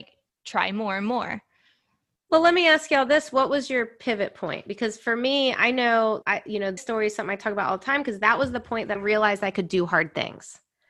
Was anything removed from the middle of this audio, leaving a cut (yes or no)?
yes